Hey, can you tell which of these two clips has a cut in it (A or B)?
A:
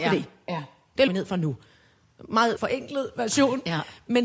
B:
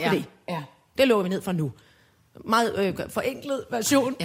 A